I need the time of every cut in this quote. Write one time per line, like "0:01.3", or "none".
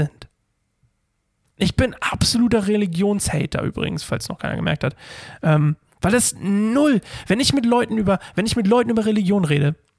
none